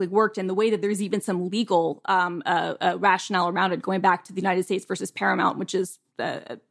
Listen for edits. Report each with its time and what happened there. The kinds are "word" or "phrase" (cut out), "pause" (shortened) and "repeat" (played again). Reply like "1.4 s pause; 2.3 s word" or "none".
none